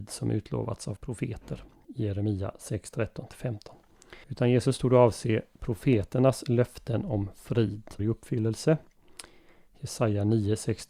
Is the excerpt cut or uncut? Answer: cut